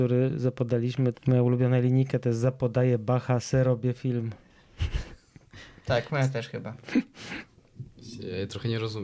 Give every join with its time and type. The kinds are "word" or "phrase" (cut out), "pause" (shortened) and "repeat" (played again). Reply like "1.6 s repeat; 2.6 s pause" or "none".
1.1 s word

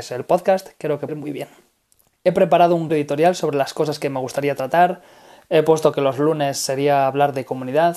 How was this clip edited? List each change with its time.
1.1 s word; 2.9 s word

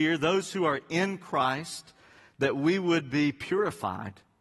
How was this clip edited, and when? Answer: none

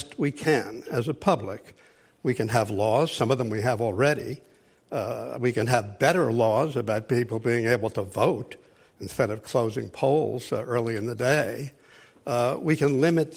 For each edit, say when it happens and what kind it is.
none

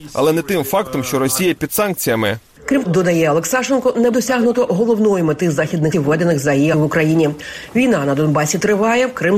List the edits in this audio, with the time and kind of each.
2.8 s word; 4.1 s word; 5.9 s word; 6.7 s word

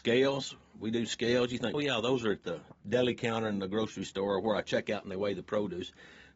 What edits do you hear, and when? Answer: 1.7 s word

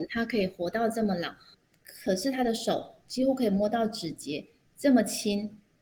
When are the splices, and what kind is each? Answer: 1.5 s pause

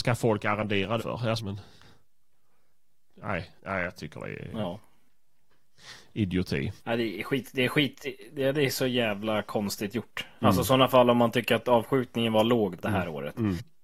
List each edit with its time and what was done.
1.0 s word; 1.4 s word; 3.6 s pause; 6.8 s pause; 12.8 s word

